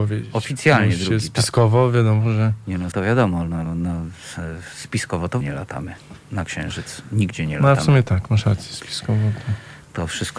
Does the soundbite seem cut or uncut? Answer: cut